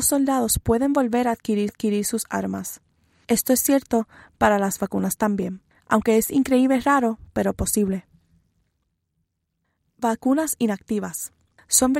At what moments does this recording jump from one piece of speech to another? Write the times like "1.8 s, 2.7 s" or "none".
1.7 s